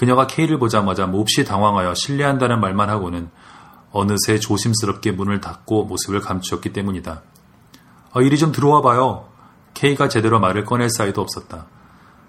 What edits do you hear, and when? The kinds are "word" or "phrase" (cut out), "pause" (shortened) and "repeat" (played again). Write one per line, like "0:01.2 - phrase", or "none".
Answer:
none

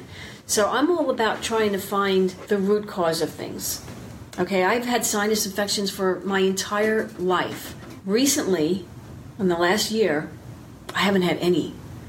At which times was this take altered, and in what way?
none

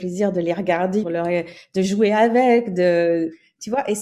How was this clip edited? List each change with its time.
0:01.0 - word

